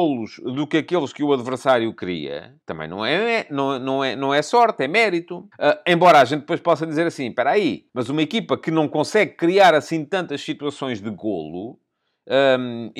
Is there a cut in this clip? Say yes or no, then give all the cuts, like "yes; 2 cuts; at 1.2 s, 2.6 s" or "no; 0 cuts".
yes; 3 cuts; at 2.6 s, 5.5 s, 7.9 s